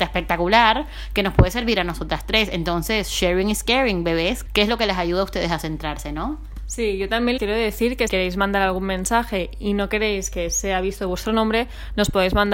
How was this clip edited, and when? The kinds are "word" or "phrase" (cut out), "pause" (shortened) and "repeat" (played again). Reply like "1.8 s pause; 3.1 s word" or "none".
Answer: 4.5 s word; 7.4 s word; 8.1 s word

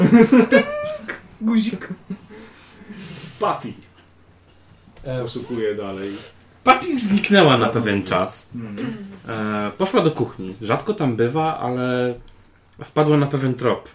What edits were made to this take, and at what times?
none

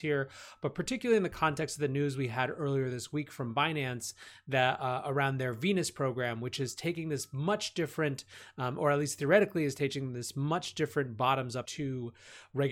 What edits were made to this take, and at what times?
11.6 s word

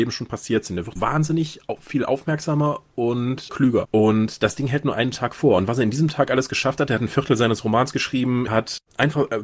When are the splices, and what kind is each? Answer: 1.0 s word; 8.5 s word

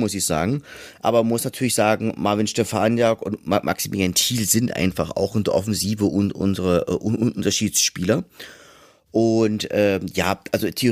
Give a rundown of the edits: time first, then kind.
none

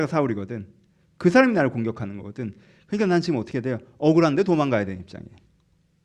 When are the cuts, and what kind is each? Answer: none

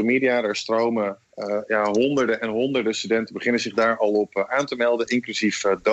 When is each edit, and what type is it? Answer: 1.2 s pause

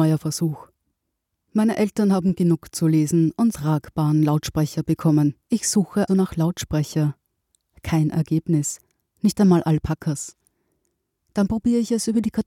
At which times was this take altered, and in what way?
3.5 s phrase; 5.4 s pause; 6.1 s word

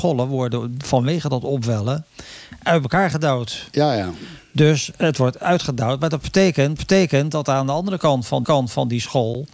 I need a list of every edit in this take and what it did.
4.9 s word; 6.8 s repeat; 8.4 s repeat

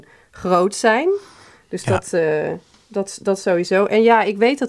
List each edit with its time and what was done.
none

